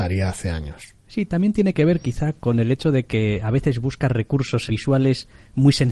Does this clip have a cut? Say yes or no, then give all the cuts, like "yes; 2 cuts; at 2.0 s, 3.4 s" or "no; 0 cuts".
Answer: yes; 2 cuts; at 1.0 s, 4.7 s